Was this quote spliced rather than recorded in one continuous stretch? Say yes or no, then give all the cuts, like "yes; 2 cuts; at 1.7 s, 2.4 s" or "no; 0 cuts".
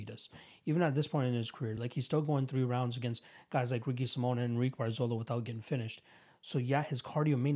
no; 0 cuts